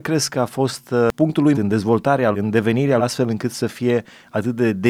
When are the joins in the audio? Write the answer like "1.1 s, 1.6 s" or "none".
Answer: 1.5 s, 2.3 s, 3.0 s